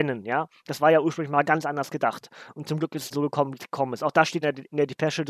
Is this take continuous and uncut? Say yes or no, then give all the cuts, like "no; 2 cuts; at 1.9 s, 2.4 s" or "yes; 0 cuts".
no; 3 cuts; at 1.4 s, 3.1 s, 4.4 s